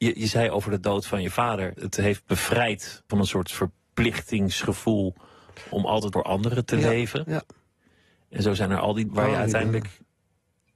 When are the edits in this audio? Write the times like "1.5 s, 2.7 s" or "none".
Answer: 1.8 s, 2.2 s, 3.1 s, 5.7 s, 6.1 s, 9.1 s